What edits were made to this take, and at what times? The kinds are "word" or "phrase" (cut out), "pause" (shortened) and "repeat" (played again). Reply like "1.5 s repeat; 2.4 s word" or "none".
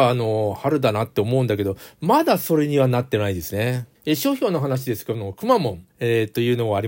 4.0 s pause; 5.9 s pause